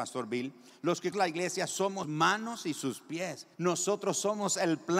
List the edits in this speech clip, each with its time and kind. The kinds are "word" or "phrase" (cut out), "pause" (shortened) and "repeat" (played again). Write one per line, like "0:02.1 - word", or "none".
0:01.1 - word
0:02.0 - word
0:03.5 - pause